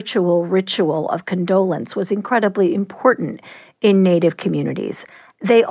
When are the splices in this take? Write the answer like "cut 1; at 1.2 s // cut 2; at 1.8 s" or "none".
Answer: none